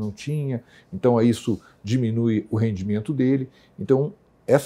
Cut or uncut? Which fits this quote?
uncut